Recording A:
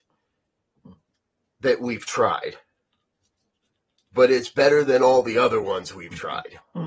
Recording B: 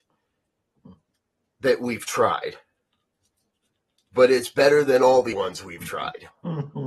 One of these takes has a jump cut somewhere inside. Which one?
B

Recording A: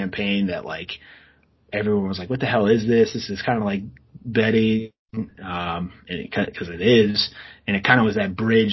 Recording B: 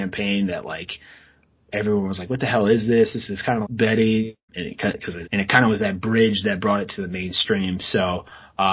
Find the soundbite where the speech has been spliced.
B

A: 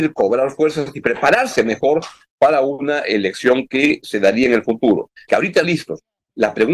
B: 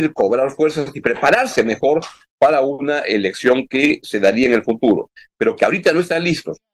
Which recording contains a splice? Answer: A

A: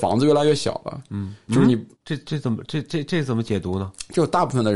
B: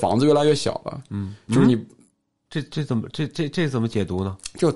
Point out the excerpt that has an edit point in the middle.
A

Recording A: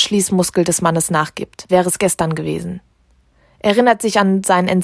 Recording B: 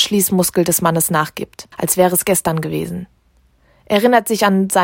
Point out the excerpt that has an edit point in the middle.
A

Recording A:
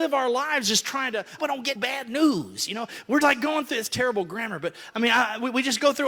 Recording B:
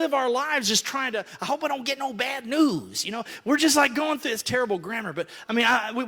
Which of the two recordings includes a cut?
A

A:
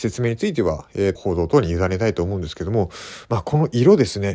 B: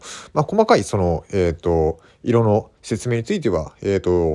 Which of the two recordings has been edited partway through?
A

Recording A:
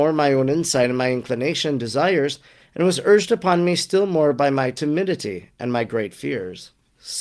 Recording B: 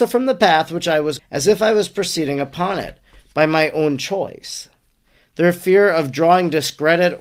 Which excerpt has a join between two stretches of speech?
B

